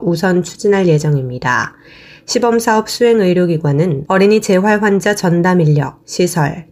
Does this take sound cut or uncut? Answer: uncut